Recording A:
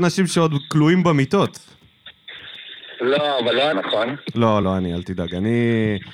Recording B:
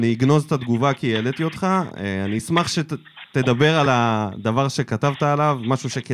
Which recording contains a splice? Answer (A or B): A